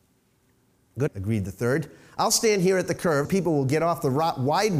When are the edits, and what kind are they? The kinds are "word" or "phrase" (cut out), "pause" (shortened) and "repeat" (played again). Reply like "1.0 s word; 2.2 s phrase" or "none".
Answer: 1.1 s word; 3.2 s word

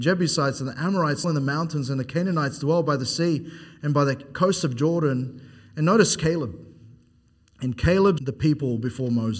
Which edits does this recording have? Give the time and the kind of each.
1.2 s word; 8.2 s word

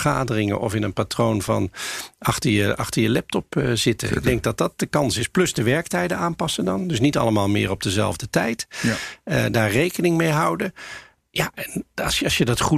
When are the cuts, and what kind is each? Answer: none

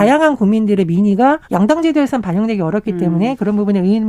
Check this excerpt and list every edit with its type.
1.4 s pause

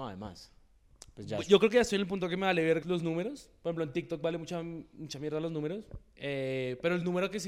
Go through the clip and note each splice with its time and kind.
2.8 s word

